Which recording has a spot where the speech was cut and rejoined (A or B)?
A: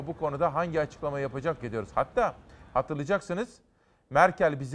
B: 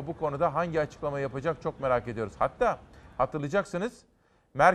A